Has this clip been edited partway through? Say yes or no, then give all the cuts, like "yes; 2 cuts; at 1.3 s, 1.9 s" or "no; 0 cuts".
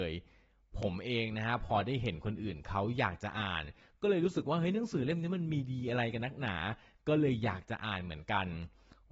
no; 0 cuts